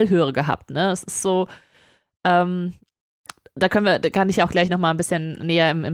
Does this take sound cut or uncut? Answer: uncut